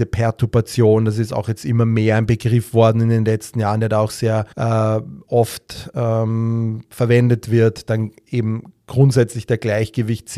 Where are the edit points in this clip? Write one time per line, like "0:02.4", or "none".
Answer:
0:04.5